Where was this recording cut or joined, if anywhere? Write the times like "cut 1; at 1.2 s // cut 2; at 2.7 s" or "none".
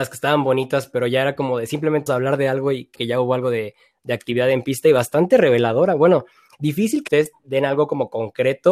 cut 1; at 2.1 s // cut 2; at 3.0 s // cut 3; at 7.1 s